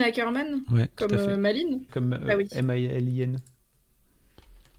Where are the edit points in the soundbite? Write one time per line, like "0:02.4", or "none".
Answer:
0:01.9